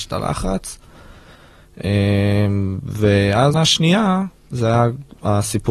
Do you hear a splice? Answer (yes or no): yes